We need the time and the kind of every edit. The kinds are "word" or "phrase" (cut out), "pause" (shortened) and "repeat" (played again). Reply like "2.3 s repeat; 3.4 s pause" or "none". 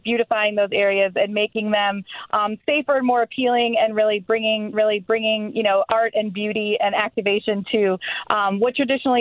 4.7 s repeat